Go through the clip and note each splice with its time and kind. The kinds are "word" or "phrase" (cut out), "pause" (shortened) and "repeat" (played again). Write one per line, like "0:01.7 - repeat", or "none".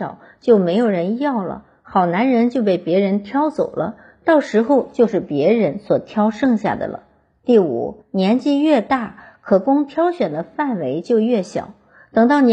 0:08.0 - pause